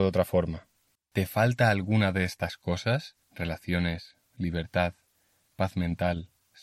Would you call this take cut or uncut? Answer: cut